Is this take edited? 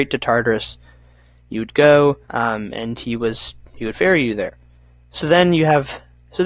yes; 1 cut; at 2.2 s

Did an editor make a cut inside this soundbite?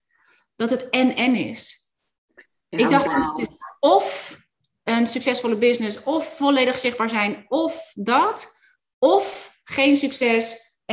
no; 0 cuts

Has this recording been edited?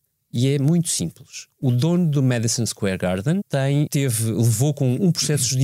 yes; 2 cuts; at 3.4 s, 3.9 s

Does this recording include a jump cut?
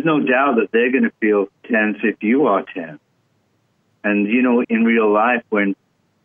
yes; 2 cuts; at 1.6 s, 4.6 s

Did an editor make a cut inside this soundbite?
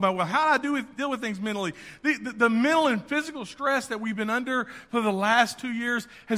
no; 0 cuts

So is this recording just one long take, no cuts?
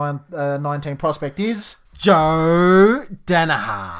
no; 1 cut; at 1.8 s

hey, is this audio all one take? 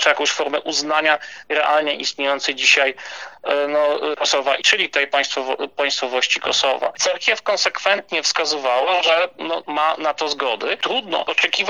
no; 3 cuts; at 4.1 s, 4.6 s, 9.6 s

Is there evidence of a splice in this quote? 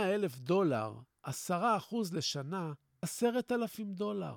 yes; 1 cut; at 3.0 s

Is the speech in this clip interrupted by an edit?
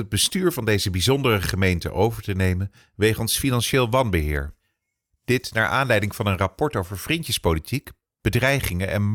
no; 0 cuts

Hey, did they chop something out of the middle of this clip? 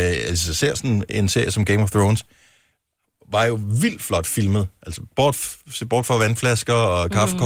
no; 0 cuts

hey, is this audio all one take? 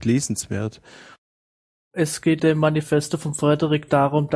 no; 1 cut; at 2.4 s

